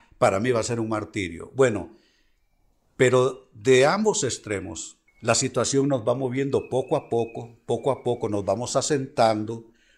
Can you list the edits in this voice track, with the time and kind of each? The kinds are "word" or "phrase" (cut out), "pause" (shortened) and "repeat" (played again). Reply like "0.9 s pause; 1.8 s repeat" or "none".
5.1 s pause